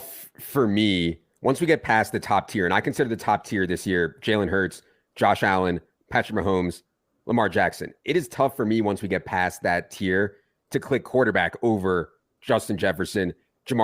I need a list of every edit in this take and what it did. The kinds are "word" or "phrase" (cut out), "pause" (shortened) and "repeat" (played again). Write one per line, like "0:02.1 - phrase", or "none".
none